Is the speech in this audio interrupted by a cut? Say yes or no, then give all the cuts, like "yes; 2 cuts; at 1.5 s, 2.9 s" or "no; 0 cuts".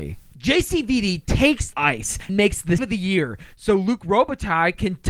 yes; 3 cuts; at 1.7 s, 2.3 s, 2.8 s